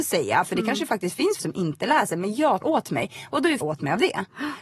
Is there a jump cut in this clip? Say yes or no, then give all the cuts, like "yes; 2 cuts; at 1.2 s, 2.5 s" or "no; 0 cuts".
yes; 3 cuts; at 1.4 s, 2.6 s, 3.6 s